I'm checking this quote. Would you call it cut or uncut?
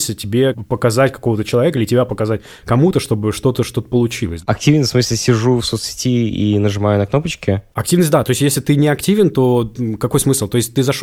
uncut